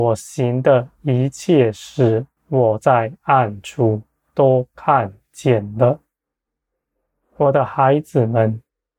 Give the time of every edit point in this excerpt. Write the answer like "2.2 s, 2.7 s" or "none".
2.4 s